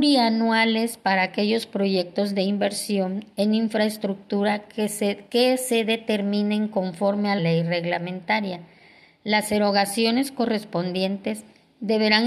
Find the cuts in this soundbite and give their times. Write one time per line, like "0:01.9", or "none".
0:07.4